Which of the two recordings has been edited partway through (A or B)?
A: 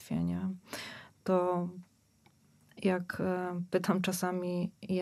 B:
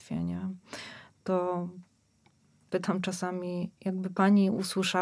B